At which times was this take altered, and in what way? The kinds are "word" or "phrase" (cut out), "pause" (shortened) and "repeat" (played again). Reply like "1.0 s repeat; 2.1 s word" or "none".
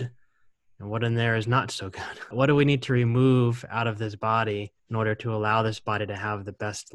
2.3 s phrase; 4.8 s pause

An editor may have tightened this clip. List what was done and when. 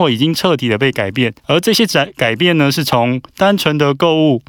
1.4 s pause

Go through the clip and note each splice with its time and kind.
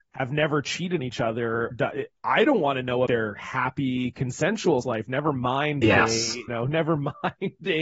1.0 s word; 1.7 s word; 3.1 s word; 4.8 s word; 5.8 s word; 6.5 s word

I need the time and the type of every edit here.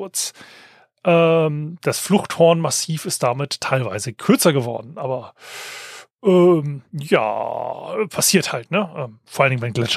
none

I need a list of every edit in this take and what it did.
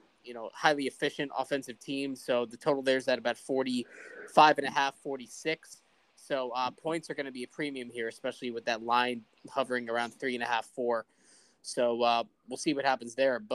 none

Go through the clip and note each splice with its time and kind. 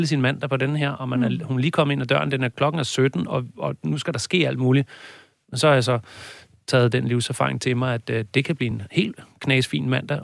none

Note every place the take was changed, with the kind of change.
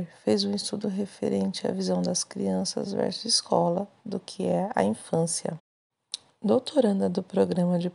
none

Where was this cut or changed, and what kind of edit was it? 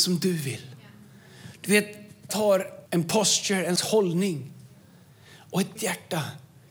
2.3 s word; 2.9 s pause; 3.8 s word; 5.8 s word

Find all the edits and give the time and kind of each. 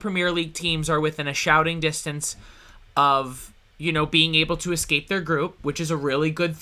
none

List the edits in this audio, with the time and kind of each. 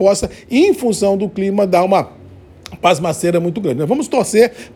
none

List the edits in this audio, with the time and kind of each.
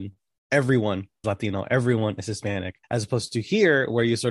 1.2 s word; 2.8 s pause

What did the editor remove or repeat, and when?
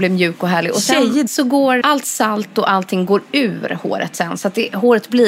1.3 s phrase; 1.8 s word

